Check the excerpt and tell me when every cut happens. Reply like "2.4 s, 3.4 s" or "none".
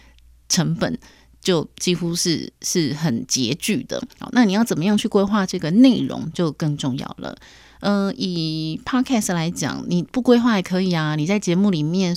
4.1 s

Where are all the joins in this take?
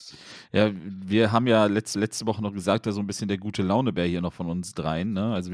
1.9 s, 2.8 s

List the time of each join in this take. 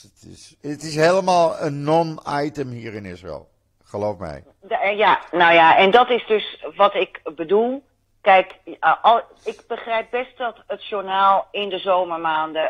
none

